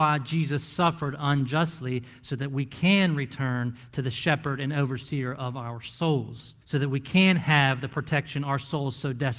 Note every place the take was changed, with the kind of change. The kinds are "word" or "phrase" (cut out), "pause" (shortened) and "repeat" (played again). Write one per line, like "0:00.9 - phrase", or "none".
0:06.6 - pause